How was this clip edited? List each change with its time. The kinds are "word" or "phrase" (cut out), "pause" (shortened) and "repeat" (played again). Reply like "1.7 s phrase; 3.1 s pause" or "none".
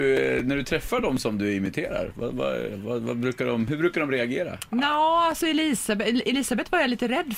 none